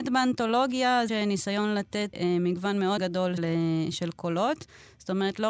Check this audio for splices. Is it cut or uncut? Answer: cut